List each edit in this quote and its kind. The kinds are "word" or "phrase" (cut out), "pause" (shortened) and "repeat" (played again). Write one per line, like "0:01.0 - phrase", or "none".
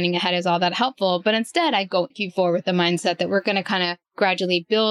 0:02.1 - word